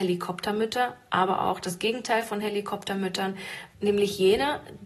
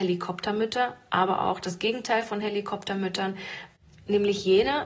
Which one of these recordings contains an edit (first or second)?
first